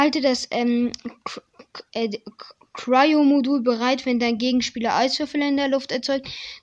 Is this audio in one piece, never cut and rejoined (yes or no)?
yes